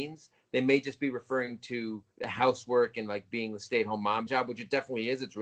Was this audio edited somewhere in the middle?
yes; 2 cuts; at 2.1 s, 4.3 s

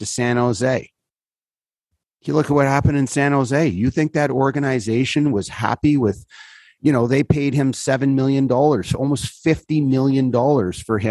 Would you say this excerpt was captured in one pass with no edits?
yes; 0 cuts

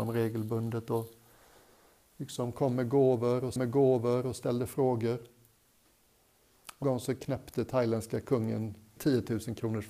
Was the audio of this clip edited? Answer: yes; 3 cuts; at 3.6 s, 6.8 s, 9.0 s

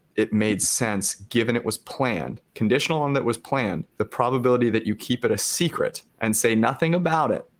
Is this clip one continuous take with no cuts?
no; 3 cuts; at 2.5 s, 3.9 s, 6.1 s

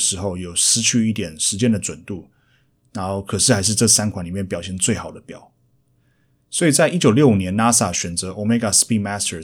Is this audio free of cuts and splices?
yes; 0 cuts

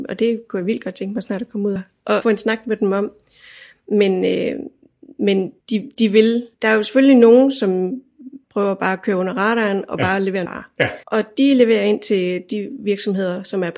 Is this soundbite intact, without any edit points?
no; 7 cuts; at 1.8 s, 2.2 s, 5.6 s, 6.5 s, 8.4 s, 10.5 s, 11.0 s

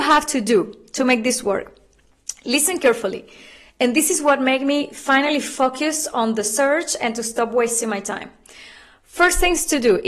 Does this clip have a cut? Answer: no; 0 cuts

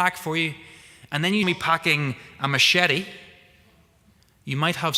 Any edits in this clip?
yes; 1 cut; at 1.4 s

